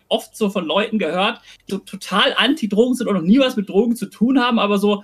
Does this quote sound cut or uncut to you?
cut